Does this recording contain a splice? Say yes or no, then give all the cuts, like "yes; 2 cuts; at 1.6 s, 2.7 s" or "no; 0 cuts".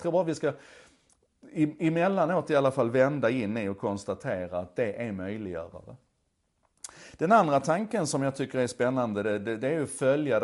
no; 0 cuts